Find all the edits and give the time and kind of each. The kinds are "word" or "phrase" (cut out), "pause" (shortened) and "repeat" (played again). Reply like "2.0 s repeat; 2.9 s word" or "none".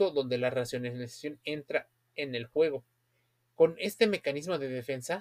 none